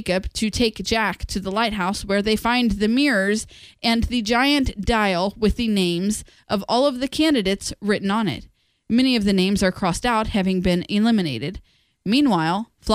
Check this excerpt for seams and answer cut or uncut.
uncut